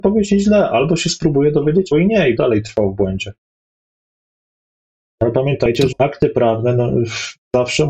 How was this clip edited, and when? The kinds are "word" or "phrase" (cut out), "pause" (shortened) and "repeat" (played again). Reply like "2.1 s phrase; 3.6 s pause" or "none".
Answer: 1.9 s word; 2.4 s word; 5.9 s word